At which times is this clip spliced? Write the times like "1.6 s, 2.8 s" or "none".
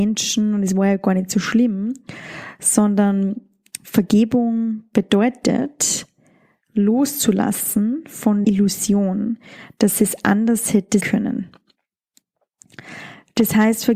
8.4 s, 11.0 s